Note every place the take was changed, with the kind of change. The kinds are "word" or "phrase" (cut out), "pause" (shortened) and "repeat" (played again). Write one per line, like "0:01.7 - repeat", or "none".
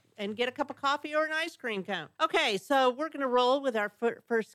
0:02.1 - pause